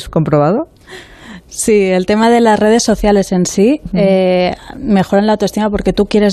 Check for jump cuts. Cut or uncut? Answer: uncut